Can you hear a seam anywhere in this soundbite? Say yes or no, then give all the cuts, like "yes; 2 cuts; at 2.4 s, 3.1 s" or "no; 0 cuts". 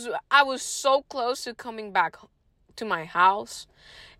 no; 0 cuts